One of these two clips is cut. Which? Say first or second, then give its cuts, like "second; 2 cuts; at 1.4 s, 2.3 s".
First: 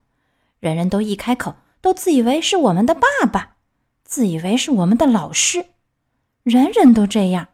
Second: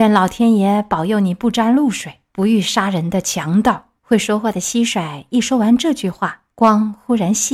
second; 3 cuts; at 2.3 s, 4.0 s, 6.5 s